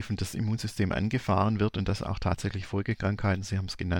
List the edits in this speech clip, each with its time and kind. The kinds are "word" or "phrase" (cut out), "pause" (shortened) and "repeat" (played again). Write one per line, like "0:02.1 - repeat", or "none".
none